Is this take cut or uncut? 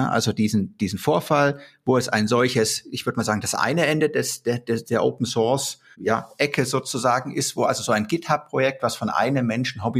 uncut